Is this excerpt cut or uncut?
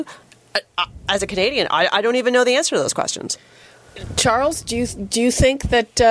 uncut